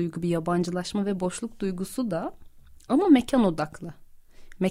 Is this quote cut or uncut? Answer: uncut